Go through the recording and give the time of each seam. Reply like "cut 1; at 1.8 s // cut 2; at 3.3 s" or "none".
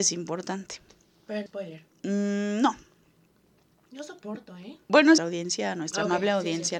cut 1; at 1.5 s // cut 2; at 5.2 s